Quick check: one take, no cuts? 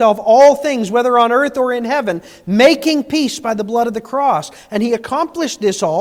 yes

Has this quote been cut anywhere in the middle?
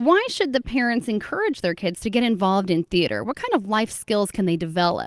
no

